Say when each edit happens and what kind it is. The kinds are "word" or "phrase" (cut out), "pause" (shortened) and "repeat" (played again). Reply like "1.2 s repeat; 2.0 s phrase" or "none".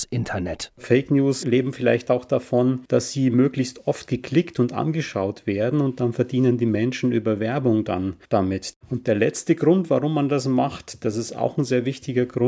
8.2 s pause